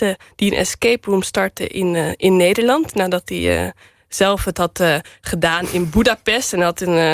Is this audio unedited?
yes; 0 cuts

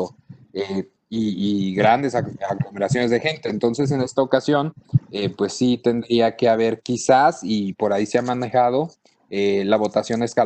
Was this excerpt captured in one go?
yes; 0 cuts

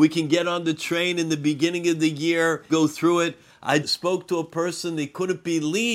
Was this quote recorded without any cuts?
no; 2 cuts; at 2.7 s, 3.8 s

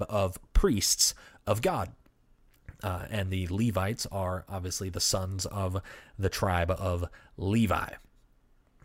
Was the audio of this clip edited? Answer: no; 0 cuts

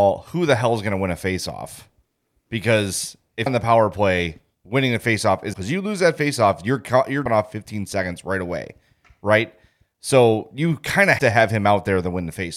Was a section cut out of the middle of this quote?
yes; 4 cuts; at 3.5 s, 5.5 s, 7.3 s, 11.2 s

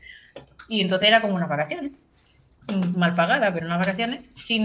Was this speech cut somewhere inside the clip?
no; 0 cuts

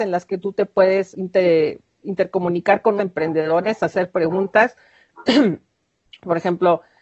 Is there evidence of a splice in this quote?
yes; 2 cuts; at 1.1 s, 3.0 s

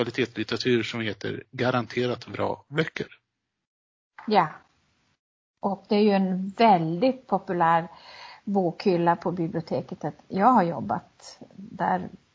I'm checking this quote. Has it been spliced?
no; 0 cuts

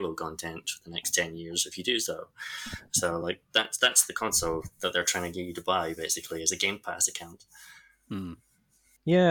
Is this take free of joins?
yes; 0 cuts

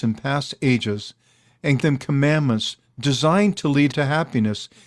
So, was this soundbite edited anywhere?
yes; 2 cuts; at 1.8 s, 3.9 s

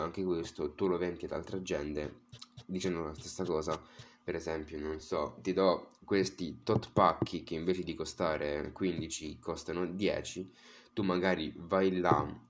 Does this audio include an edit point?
no; 0 cuts

